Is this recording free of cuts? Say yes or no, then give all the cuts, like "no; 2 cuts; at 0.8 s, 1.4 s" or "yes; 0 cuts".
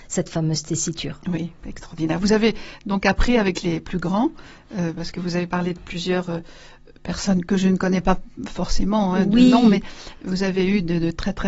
yes; 0 cuts